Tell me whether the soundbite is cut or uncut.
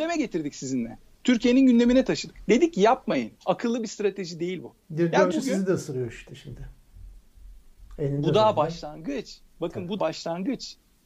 cut